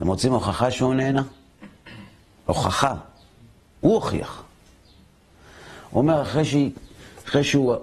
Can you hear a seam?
no; 0 cuts

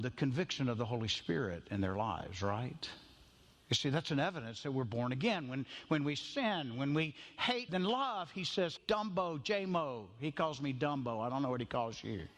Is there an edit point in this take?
yes; 2 cuts; at 7.7 s, 8.8 s

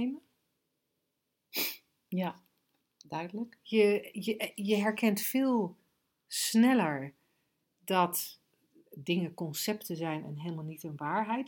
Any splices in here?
no; 0 cuts

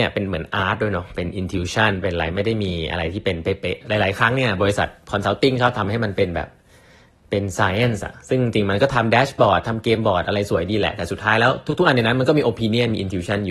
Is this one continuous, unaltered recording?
yes; 0 cuts

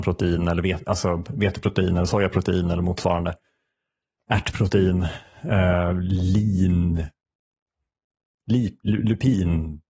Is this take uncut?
yes; 0 cuts

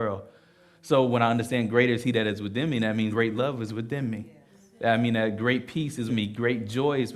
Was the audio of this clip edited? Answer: yes; 2 cuts; at 3.1 s, 6.1 s

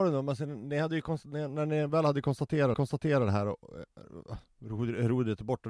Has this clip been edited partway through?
yes; 1 cut; at 2.7 s

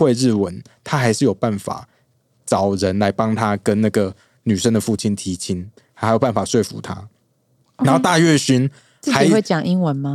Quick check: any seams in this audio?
no; 0 cuts

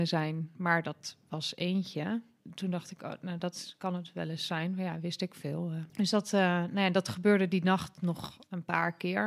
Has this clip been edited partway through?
yes; 1 cut; at 5.9 s

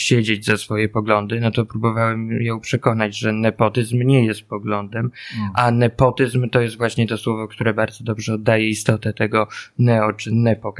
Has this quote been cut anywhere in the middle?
no; 0 cuts

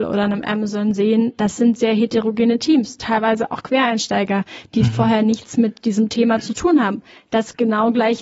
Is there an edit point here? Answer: no; 0 cuts

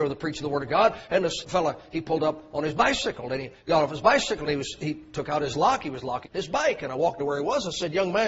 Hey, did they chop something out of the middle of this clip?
yes; 3 cuts; at 1.4 s, 6.2 s, 7.2 s

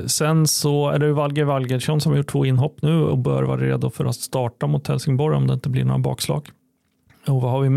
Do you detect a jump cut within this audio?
no; 0 cuts

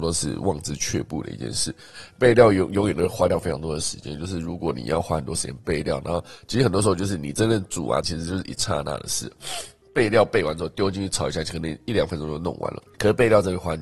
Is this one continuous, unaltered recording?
no; 1 cut; at 8.0 s

